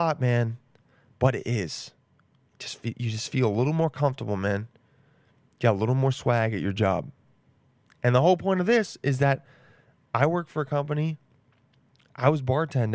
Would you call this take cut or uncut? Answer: uncut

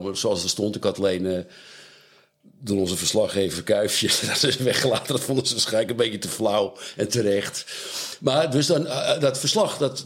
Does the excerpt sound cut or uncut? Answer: uncut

